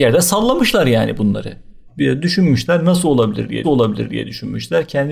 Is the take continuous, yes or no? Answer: no